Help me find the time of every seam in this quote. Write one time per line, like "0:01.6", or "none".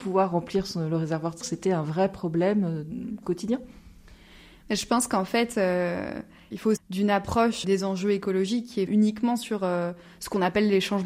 0:01.4
0:06.8
0:07.6
0:08.9